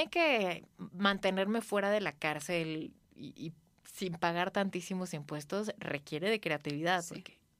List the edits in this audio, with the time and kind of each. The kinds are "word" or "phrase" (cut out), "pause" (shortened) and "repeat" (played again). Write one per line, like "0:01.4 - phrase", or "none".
none